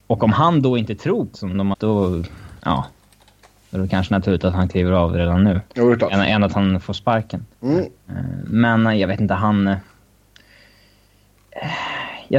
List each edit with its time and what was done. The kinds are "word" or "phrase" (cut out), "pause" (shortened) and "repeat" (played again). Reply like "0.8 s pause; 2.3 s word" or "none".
1.3 s phrase; 1.7 s phrase; 2.6 s pause; 5.7 s pause; 7.5 s pause